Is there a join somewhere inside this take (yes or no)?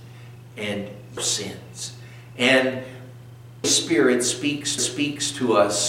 yes